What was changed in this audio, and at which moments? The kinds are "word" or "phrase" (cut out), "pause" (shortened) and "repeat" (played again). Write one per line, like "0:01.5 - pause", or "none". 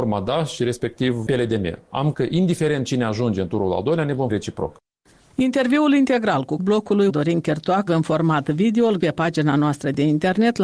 0:02.1 - word
0:04.3 - word
0:06.6 - word
0:07.1 - word
0:07.9 - word
0:09.0 - word